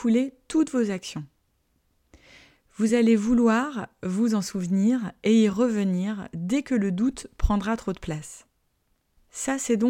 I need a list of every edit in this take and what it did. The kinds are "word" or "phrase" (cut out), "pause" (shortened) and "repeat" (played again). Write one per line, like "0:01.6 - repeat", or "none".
none